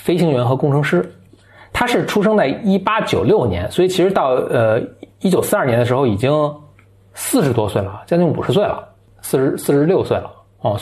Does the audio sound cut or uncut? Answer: uncut